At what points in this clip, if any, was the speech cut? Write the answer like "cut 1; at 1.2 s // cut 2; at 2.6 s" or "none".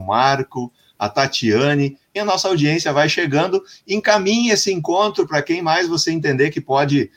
cut 1; at 2.2 s